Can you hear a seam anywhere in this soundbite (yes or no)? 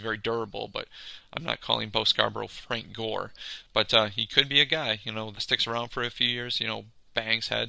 yes